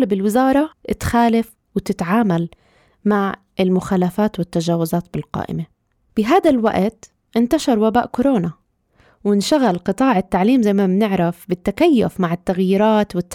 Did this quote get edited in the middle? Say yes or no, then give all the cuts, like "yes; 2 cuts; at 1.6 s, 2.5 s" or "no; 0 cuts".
no; 0 cuts